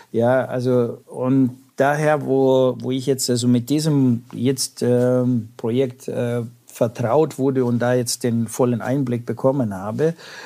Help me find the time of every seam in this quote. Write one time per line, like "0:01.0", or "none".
none